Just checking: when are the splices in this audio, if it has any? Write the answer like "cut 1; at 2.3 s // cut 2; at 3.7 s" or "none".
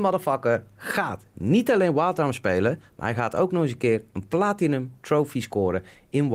none

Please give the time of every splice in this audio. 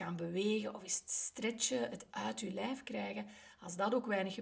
cut 1; at 2.1 s

